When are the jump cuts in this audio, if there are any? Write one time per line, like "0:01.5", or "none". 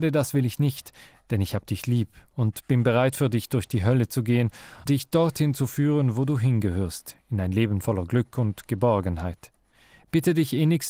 0:04.9